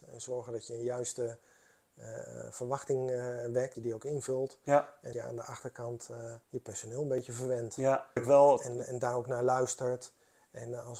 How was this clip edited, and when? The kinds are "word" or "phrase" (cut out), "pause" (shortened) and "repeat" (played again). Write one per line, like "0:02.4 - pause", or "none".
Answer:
0:03.7 - phrase
0:05.1 - word
0:06.4 - pause
0:08.2 - phrase